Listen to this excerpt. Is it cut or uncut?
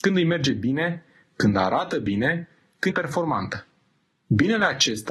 cut